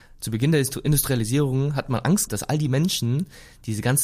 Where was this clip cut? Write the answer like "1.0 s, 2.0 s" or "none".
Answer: 2.3 s